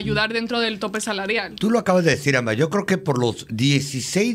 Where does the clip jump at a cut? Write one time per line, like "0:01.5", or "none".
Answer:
none